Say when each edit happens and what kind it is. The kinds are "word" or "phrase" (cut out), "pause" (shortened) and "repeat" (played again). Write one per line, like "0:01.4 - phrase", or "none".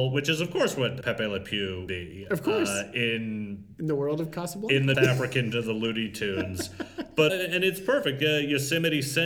0:01.0 - word
0:01.9 - word
0:03.7 - word
0:04.9 - word
0:05.5 - word
0:07.3 - word